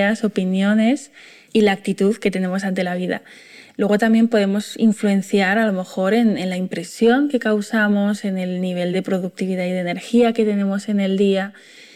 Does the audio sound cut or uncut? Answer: uncut